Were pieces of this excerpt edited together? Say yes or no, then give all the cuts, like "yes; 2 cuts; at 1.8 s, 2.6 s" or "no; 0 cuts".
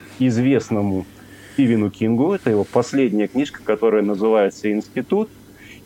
no; 0 cuts